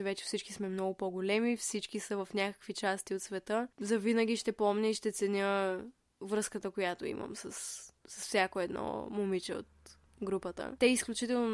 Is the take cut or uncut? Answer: uncut